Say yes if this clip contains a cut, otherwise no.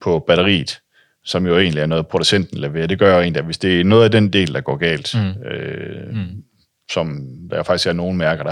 no